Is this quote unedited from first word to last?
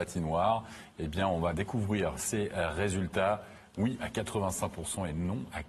yes; 0 cuts

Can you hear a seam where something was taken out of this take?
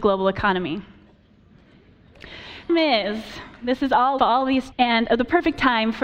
yes; 3 cuts; at 2.7 s, 4.2 s, 4.7 s

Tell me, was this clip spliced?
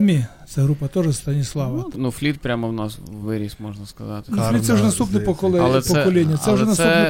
yes; 2 cuts; at 1.9 s, 3.2 s

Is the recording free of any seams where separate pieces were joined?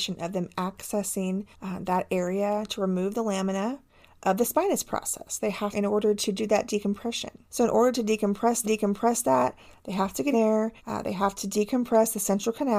no; 6 cuts; at 1.5 s, 5.7 s, 7.5 s, 8.6 s, 10.3 s, 10.8 s

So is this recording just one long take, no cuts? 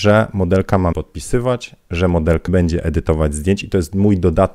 no; 2 cuts; at 0.9 s, 2.5 s

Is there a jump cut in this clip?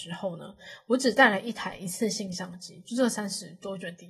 no; 0 cuts

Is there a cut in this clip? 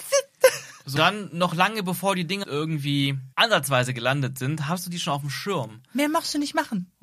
yes; 3 cuts; at 1.0 s, 2.4 s, 3.3 s

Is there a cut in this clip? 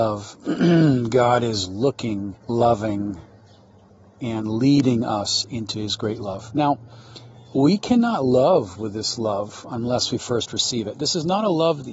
yes; 1 cut; at 2.4 s

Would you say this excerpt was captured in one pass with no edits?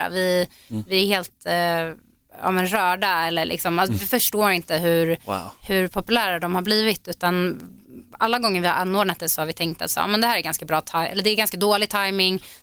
yes; 0 cuts

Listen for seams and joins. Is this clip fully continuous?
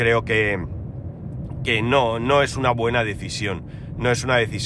no; 1 cut; at 1.6 s

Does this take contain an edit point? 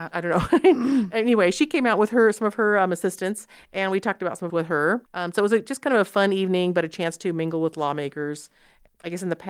yes; 2 cuts; at 4.5 s, 5.1 s

